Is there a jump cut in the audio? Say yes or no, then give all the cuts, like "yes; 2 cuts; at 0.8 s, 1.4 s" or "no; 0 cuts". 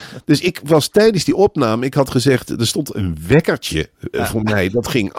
yes; 1 cut; at 4.1 s